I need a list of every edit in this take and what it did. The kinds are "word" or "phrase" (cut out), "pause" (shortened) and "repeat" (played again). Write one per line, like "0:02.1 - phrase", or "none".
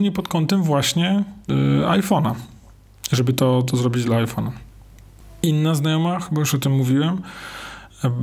0:01.4 - pause